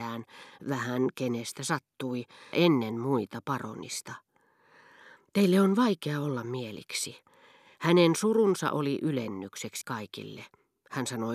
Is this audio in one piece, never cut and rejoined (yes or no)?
no